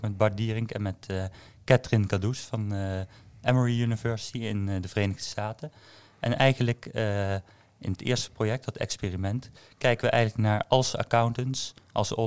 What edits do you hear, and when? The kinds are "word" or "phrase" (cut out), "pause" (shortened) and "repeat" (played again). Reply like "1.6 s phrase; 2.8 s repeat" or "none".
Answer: none